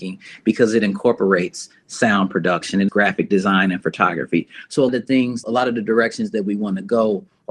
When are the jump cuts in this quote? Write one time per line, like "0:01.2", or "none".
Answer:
0:02.9
0:04.9
0:05.4